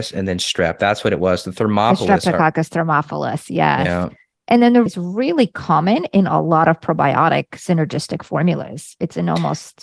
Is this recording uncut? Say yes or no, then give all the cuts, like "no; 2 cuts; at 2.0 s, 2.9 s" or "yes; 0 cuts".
no; 1 cut; at 4.9 s